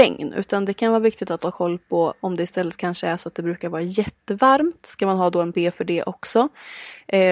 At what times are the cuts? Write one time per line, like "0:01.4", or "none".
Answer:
0:05.5